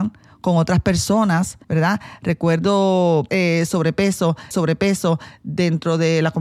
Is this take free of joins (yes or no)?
no